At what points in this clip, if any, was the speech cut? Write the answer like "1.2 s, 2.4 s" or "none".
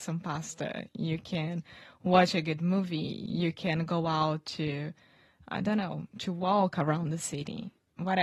6.1 s